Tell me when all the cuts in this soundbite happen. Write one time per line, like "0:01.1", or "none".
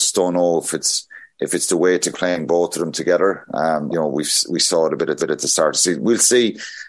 0:02.1
0:03.9
0:05.2